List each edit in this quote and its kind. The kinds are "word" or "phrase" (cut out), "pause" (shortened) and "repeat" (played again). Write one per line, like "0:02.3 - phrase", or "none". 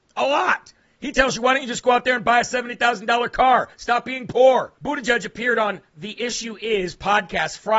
0:04.8 - pause